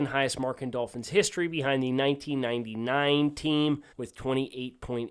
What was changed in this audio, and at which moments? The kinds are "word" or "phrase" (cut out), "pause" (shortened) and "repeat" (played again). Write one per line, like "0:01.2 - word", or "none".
0:03.9 - pause